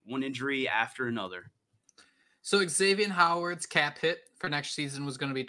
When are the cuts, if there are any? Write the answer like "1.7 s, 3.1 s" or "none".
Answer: none